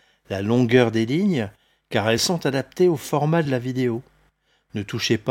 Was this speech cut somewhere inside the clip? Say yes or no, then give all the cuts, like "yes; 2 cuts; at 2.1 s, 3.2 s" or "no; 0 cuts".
no; 0 cuts